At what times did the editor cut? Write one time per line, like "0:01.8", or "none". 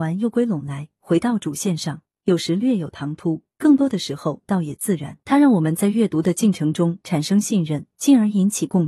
0:05.2